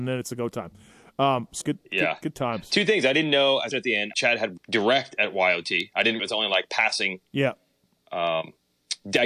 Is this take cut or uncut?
cut